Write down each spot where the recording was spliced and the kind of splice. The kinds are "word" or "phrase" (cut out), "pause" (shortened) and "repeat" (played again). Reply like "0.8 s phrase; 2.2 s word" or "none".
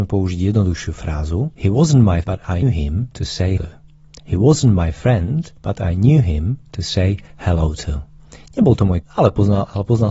1.5 s pause; 2.2 s word; 2.6 s word; 3.6 s word; 5.6 s pause; 9.0 s word

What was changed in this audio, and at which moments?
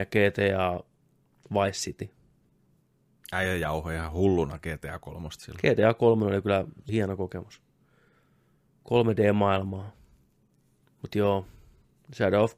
6.9 s word

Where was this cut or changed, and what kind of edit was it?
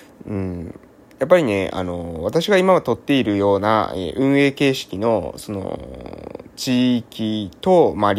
none

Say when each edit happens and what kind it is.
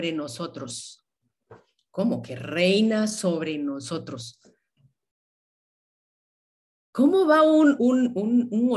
7.8 s word

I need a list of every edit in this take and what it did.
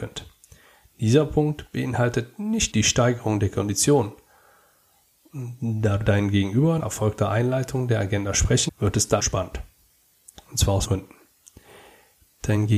2.7 s word; 6.0 s word; 6.8 s word; 8.7 s word; 9.2 s word; 10.8 s word

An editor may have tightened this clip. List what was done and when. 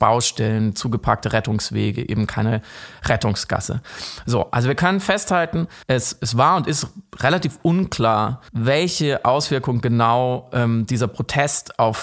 5.8 s pause; 8.5 s pause

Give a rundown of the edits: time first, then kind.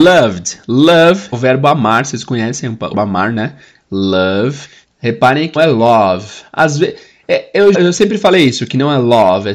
1.3 s word; 2.9 s word; 5.6 s word; 7.7 s word

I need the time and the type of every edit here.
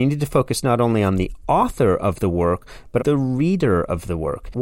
3.0 s word

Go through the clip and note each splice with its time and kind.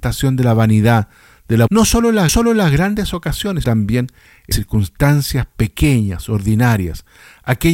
1.7 s word; 2.3 s repeat; 3.6 s word; 4.5 s word

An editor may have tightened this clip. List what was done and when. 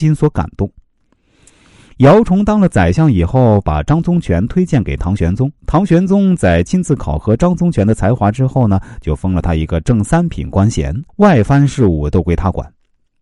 5.6 s pause; 11.1 s pause

